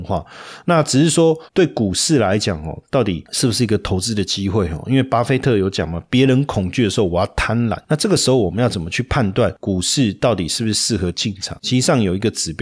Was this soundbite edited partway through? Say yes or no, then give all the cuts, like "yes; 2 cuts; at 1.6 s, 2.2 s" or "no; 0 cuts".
yes; 1 cut; at 1.5 s